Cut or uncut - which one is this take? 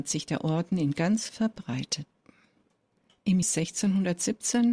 cut